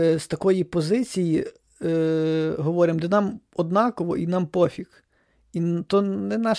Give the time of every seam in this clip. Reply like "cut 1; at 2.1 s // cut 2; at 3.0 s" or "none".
none